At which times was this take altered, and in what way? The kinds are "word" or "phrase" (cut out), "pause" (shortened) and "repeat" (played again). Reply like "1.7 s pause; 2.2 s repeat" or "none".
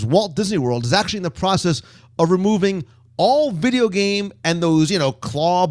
none